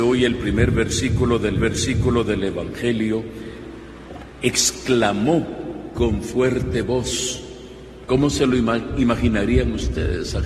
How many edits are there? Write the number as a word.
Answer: one